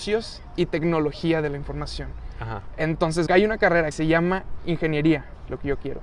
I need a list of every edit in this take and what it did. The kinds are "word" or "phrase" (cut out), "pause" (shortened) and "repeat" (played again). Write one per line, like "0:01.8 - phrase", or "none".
0:03.3 - word
0:03.9 - word